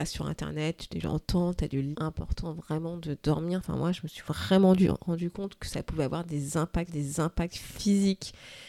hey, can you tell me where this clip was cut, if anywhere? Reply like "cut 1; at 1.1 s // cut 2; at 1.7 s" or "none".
cut 1; at 1.9 s // cut 2; at 6.9 s